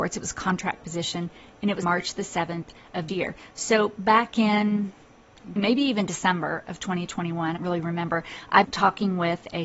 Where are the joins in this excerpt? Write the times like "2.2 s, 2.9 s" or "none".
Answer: 1.8 s, 3.1 s, 5.6 s, 7.6 s, 8.6 s